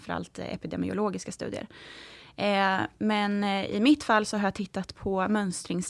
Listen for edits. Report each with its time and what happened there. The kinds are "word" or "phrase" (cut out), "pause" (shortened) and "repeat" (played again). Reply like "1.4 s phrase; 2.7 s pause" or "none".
none